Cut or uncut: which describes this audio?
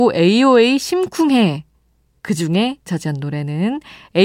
cut